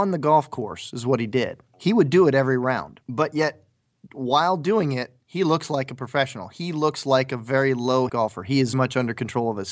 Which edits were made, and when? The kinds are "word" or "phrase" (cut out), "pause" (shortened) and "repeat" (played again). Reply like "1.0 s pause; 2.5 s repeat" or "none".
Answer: 3.0 s pause; 8.1 s word; 8.7 s word